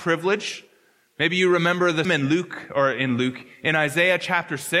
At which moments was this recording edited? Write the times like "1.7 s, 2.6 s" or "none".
2.0 s